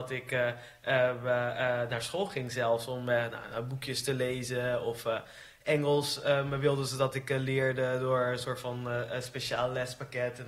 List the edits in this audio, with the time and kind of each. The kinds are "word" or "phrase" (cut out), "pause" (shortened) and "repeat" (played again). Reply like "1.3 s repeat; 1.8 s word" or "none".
none